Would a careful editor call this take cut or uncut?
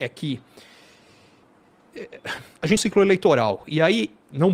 cut